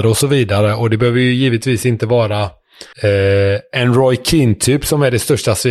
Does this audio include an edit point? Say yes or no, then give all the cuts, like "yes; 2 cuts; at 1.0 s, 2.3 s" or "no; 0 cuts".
yes; 1 cut; at 2.9 s